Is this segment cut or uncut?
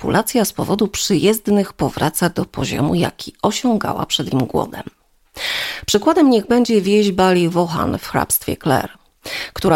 cut